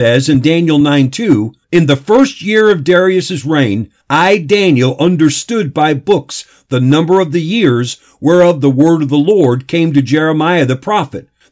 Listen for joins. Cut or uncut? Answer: cut